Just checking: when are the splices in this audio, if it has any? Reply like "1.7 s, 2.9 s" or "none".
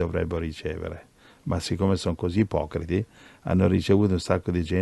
none